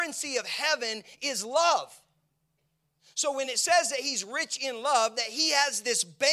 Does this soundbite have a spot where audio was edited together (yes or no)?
no